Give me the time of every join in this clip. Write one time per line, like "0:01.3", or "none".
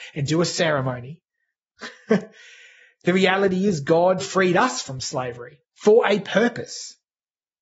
0:04.2
0:05.7